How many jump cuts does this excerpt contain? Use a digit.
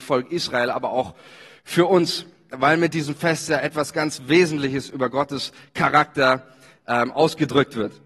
0